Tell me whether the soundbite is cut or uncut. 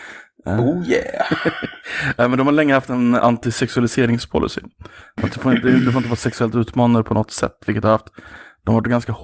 uncut